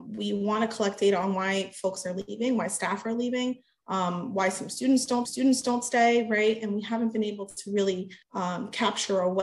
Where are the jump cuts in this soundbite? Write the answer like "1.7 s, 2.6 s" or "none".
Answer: 5.2 s, 8.2 s